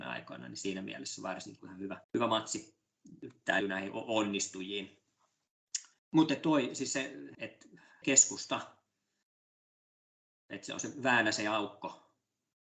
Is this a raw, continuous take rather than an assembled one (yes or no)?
no